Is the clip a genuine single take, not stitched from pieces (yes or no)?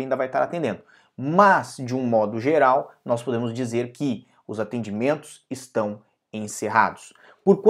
yes